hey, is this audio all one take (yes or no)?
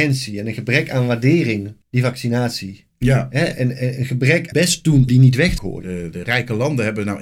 no